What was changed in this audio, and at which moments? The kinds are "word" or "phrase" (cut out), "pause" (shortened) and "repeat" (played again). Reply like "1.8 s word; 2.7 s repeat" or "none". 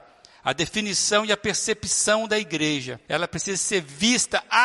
3.0 s pause